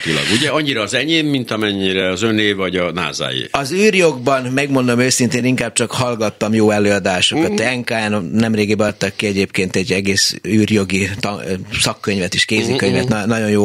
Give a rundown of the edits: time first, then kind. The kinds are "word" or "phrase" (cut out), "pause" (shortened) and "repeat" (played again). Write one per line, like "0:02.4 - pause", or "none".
none